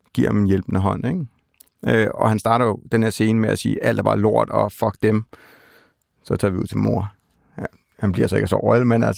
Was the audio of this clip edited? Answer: no; 0 cuts

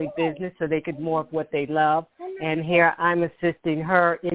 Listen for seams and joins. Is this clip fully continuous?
no; 1 cut; at 1.0 s

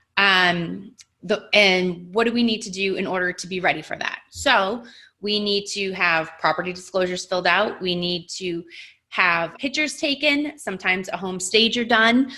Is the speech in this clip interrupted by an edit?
yes; 1 cut; at 9.6 s

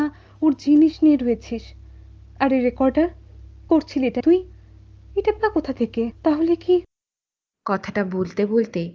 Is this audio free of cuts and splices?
no; 4 cuts; at 3.7 s, 4.2 s, 5.4 s, 6.2 s

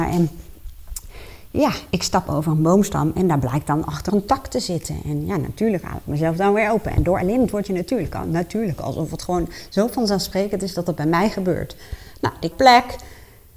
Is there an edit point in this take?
yes; 2 cuts; at 4.1 s, 12.5 s

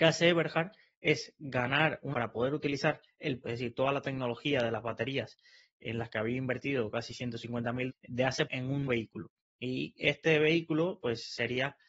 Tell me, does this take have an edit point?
yes; 5 cuts; at 2.1 s, 3.4 s, 7.9 s, 8.5 s, 8.9 s

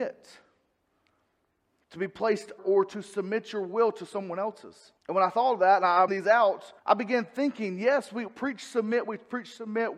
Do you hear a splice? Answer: yes; 5 cuts; at 2.6 s, 5.0 s, 6.1 s, 6.8 s, 8.3 s

